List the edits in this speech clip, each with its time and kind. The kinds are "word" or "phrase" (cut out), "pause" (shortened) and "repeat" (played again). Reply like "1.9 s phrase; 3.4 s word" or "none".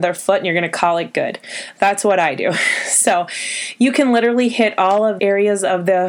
5.2 s word